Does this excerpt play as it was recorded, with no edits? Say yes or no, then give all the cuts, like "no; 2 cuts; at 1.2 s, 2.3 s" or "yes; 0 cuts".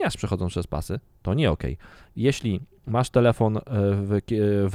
yes; 0 cuts